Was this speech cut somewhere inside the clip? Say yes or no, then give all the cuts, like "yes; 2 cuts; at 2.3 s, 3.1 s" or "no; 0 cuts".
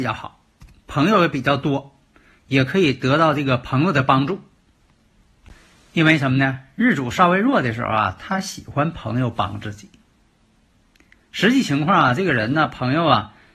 no; 0 cuts